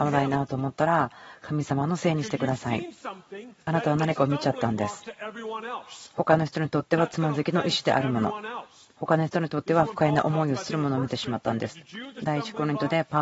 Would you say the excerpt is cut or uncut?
uncut